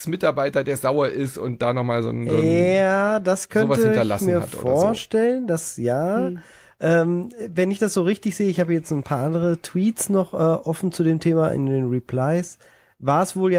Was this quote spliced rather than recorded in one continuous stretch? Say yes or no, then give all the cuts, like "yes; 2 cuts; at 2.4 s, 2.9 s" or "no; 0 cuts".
no; 0 cuts